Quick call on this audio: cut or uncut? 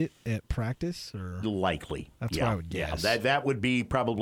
cut